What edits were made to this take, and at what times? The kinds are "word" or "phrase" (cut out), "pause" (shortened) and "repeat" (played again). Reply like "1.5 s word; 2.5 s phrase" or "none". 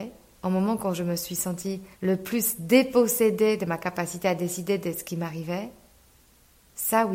1.9 s pause